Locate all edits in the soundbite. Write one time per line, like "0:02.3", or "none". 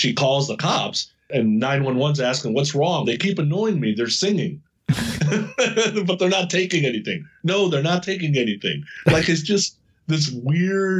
0:03.0

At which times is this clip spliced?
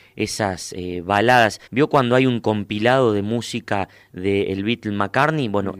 0:01.7

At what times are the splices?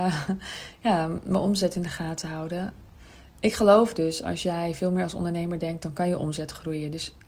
none

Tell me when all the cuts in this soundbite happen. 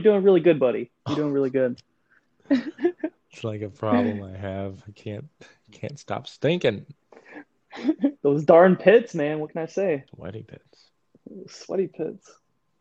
0:01.0
0:08.2

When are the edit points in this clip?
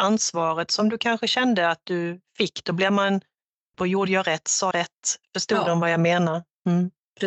0:03.7
0:04.7

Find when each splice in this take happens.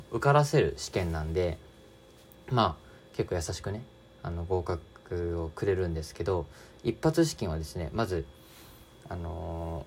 none

